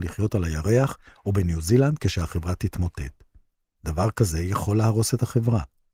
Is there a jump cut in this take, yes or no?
no